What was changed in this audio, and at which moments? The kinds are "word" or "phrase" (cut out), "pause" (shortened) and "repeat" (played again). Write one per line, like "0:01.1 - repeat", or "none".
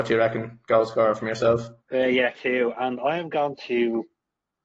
0:01.8 - pause
0:02.3 - word